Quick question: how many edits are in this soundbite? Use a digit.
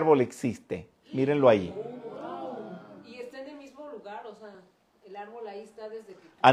0